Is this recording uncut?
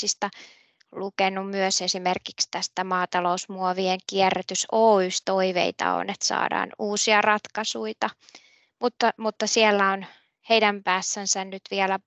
no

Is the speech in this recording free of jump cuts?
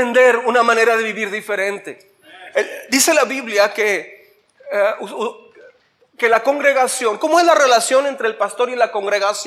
yes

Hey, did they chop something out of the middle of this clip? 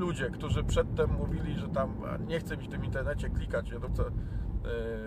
yes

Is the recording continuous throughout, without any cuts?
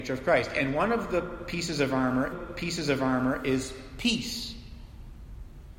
no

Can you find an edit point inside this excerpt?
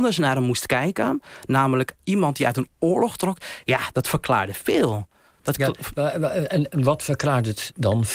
no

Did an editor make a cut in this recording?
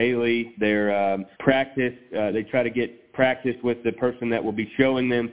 yes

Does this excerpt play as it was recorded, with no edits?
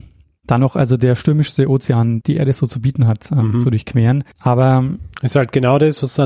no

